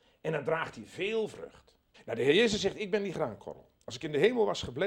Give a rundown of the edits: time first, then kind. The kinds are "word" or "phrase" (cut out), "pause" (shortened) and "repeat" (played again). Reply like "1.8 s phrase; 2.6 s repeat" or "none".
1.9 s pause